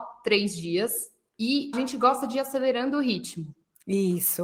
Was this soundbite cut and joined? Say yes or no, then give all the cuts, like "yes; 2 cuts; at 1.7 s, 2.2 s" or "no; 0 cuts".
yes; 1 cut; at 1.7 s